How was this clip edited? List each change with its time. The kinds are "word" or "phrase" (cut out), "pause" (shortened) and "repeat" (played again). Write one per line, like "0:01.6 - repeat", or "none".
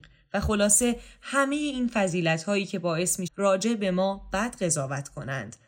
0:03.3 - word